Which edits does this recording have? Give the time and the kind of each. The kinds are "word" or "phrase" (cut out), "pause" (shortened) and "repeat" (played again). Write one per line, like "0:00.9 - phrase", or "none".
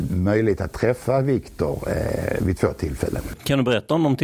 none